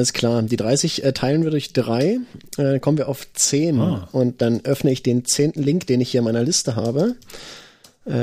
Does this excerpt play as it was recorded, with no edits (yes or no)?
yes